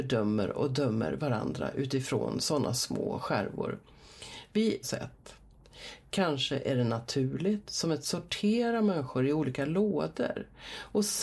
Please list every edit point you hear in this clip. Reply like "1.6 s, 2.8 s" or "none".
4.8 s, 8.0 s